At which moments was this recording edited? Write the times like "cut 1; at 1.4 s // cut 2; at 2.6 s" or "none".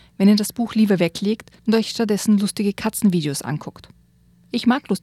cut 1; at 1.6 s